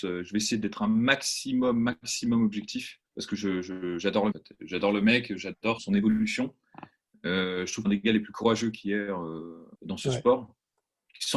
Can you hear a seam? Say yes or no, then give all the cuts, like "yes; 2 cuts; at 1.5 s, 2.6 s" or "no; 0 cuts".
yes; 5 cuts; at 3.0 s, 4.3 s, 5.8 s, 7.8 s, 9.7 s